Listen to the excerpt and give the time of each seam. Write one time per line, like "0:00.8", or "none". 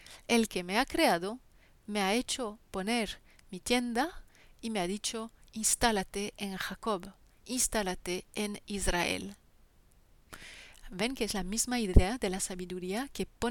none